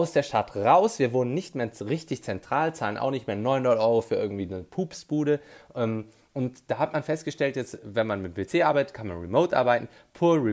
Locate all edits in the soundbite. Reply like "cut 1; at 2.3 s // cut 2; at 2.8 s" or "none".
none